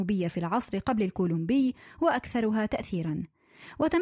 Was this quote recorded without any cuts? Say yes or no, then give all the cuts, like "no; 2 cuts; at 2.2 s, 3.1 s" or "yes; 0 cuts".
yes; 0 cuts